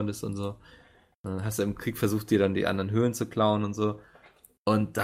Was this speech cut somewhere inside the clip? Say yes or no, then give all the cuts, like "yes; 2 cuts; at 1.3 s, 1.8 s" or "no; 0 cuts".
no; 0 cuts